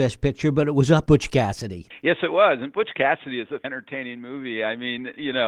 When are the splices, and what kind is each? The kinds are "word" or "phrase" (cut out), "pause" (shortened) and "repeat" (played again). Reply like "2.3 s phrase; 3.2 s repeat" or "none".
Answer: 1.1 s word; 3.6 s word